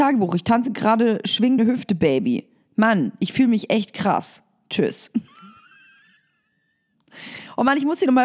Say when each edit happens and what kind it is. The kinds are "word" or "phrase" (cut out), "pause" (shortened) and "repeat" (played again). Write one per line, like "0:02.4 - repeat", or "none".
0:01.6 - word

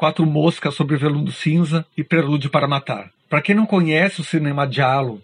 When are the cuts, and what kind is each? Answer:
0:01.9 - pause

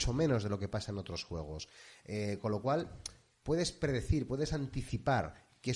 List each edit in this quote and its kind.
none

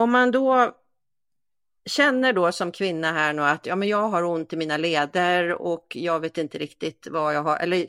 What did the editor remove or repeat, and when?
none

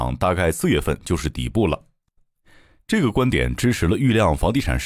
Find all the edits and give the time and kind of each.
none

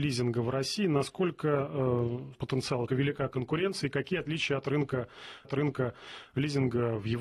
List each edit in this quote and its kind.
0:02.3 - word
0:02.9 - phrase
0:05.4 - repeat

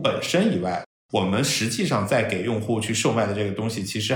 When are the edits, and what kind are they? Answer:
none

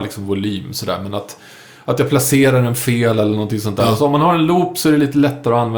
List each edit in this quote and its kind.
none

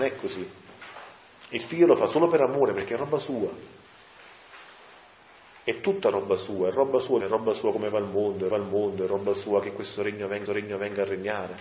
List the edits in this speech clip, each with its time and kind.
0:07.2 - phrase
0:08.5 - repeat
0:10.5 - repeat

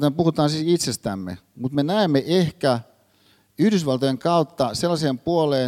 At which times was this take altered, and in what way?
none

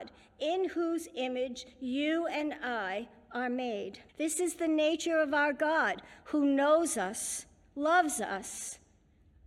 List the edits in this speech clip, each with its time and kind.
0:04.1 - pause

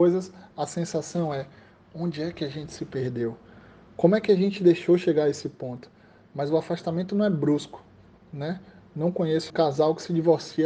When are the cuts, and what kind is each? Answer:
0:09.5 - word

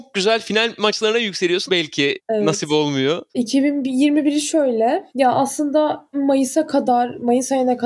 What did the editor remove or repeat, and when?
0:01.7 - phrase
0:03.3 - pause
0:05.1 - pause
0:06.1 - word

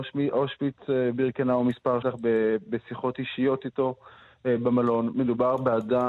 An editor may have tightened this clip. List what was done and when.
0:02.0 - phrase

